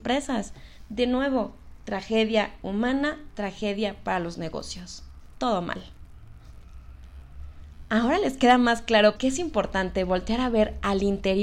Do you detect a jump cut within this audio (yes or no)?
yes